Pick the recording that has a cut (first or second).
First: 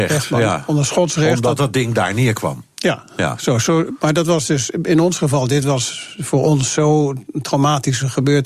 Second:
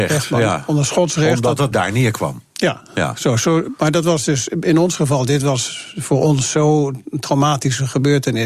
second